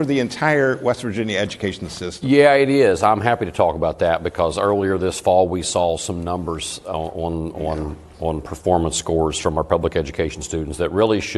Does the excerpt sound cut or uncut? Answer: uncut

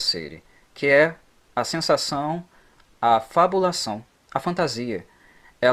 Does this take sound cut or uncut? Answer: uncut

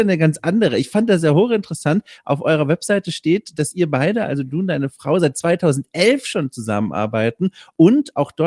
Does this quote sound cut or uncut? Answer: uncut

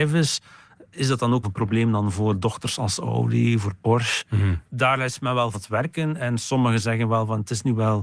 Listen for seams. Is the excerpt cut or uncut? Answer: cut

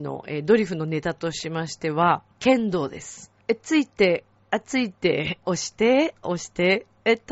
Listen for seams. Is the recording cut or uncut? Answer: cut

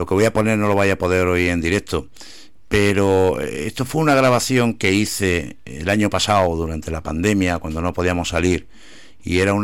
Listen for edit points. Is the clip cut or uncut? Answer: uncut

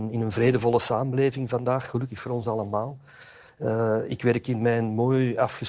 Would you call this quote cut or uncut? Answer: uncut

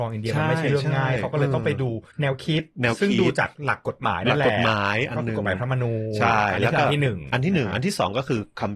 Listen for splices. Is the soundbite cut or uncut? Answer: cut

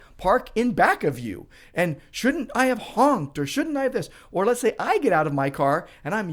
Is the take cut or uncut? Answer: uncut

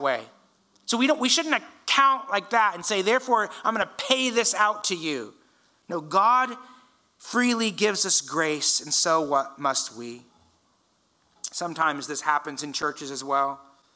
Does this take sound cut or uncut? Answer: uncut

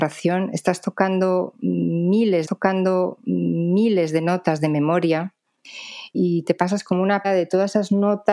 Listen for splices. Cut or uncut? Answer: cut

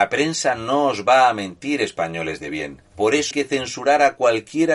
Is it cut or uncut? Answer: cut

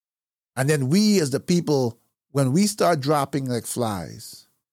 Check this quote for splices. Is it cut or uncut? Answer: uncut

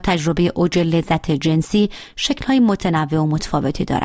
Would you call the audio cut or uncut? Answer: uncut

